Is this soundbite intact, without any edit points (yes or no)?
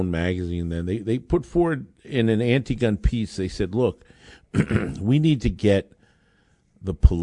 yes